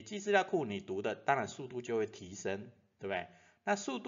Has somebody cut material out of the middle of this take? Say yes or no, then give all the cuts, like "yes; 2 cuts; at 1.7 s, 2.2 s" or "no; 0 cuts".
no; 0 cuts